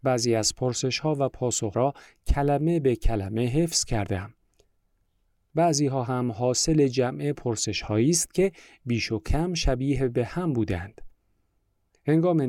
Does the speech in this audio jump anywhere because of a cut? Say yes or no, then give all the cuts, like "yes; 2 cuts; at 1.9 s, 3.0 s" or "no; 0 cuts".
yes; 1 cut; at 1.7 s